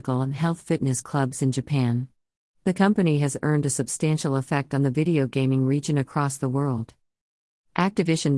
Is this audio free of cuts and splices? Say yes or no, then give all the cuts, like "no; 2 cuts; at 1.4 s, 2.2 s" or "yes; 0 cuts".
yes; 0 cuts